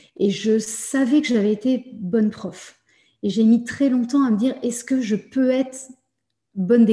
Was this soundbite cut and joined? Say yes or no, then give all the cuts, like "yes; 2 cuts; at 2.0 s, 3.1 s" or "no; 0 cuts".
no; 0 cuts